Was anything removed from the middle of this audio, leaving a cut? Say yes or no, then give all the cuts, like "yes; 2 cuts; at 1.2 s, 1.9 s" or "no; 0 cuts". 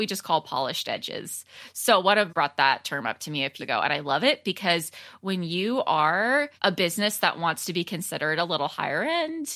yes; 3 cuts; at 2.3 s, 3.6 s, 6.6 s